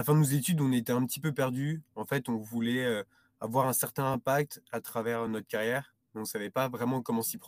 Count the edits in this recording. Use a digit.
0